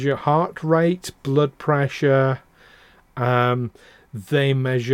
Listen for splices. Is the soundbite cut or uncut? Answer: uncut